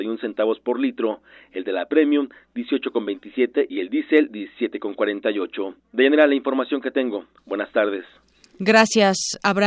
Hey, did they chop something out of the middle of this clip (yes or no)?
no